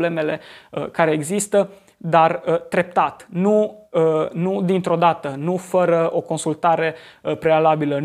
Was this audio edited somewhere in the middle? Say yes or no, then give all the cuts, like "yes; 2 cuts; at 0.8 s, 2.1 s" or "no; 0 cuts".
no; 0 cuts